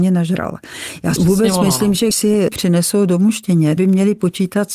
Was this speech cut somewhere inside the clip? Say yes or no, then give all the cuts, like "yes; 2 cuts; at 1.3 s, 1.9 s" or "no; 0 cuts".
yes; 4 cuts; at 1.2 s, 2.1 s, 2.5 s, 3.8 s